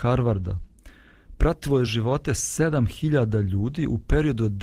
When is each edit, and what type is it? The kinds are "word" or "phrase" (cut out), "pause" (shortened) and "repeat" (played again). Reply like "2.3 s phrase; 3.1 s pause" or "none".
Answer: none